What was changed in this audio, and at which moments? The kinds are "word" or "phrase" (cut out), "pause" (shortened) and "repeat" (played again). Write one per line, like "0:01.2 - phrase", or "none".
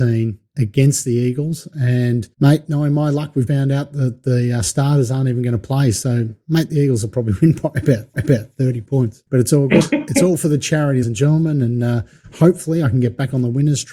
0:02.3 - pause
0:03.5 - word
0:08.1 - repeat
0:09.3 - pause
0:11.0 - word